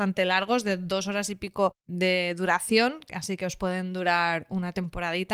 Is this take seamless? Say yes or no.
no